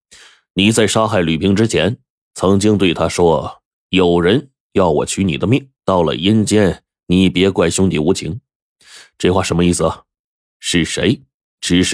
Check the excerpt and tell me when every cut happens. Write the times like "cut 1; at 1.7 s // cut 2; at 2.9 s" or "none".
cut 1; at 5.7 s